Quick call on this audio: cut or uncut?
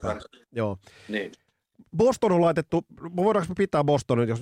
uncut